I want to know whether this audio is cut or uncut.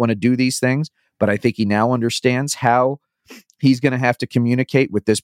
uncut